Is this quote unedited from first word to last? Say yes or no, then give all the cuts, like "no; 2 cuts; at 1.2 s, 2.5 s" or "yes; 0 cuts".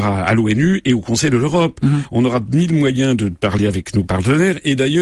yes; 0 cuts